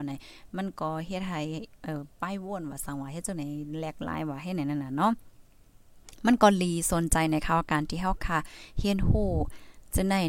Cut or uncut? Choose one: uncut